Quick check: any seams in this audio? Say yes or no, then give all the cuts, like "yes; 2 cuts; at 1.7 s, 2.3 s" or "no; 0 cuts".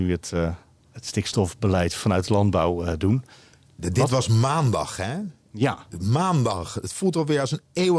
no; 0 cuts